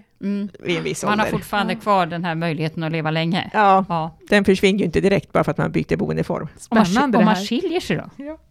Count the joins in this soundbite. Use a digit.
1